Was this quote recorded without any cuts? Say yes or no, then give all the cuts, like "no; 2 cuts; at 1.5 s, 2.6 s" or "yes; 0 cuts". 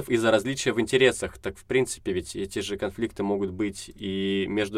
yes; 0 cuts